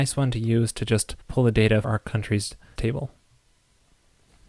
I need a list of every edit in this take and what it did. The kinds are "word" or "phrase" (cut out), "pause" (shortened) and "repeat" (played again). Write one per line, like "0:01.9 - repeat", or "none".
0:01.2 - pause
0:01.8 - word
0:02.8 - word